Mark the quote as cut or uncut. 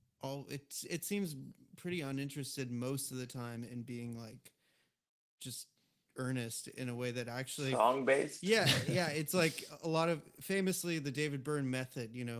uncut